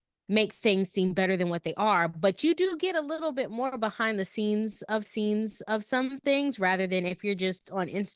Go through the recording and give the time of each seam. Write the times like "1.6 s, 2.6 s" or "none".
5.1 s